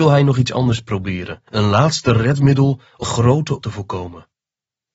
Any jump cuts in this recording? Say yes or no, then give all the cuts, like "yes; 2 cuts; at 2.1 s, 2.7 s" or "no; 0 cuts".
yes; 3 cuts; at 1.5 s, 3.0 s, 3.6 s